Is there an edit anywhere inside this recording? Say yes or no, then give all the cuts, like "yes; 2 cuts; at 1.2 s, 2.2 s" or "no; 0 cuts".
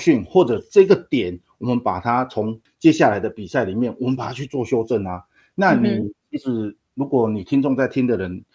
no; 0 cuts